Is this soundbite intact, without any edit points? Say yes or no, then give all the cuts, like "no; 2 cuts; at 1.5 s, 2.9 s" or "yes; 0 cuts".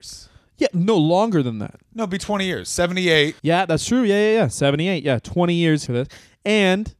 no; 3 cuts; at 1.8 s, 3.4 s, 5.9 s